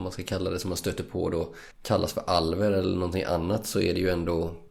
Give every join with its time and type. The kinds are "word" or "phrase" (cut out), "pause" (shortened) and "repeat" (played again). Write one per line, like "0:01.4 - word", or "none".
0:01.7 - pause